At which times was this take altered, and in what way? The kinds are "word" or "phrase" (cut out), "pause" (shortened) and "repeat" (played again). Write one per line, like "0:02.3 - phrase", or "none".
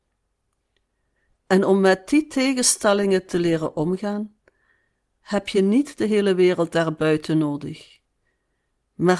none